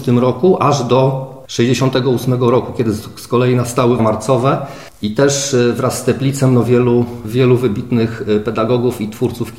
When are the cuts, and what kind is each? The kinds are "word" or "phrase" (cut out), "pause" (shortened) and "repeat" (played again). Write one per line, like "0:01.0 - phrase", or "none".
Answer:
0:04.0 - word